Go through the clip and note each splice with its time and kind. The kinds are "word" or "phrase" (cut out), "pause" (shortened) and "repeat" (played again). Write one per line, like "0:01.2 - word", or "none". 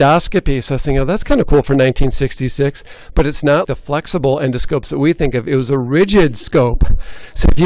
0:03.6 - word